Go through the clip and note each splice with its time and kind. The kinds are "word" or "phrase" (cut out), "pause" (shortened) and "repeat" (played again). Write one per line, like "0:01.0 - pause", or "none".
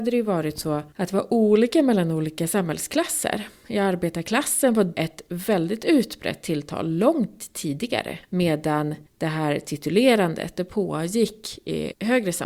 0:04.9 - word